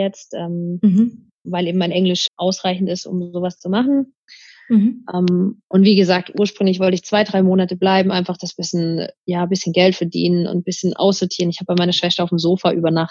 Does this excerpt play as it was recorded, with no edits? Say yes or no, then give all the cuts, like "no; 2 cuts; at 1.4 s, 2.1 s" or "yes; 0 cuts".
no; 1 cut; at 2.3 s